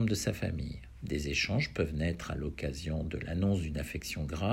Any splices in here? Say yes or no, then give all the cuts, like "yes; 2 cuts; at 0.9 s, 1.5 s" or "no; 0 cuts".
no; 0 cuts